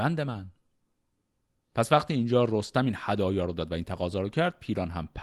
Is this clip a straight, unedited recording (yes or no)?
yes